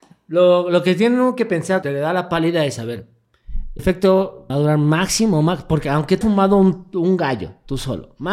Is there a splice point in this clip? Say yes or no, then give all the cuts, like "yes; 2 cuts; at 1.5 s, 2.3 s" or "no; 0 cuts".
yes; 4 cuts; at 1.8 s, 3.8 s, 4.5 s, 6.2 s